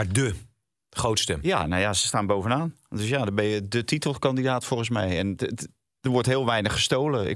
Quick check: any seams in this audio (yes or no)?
no